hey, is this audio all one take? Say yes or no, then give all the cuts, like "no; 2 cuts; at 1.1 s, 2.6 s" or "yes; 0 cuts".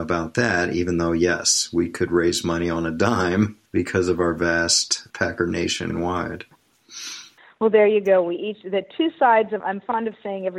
no; 5 cuts; at 3.7 s, 5.1 s, 5.9 s, 7.4 s, 9.6 s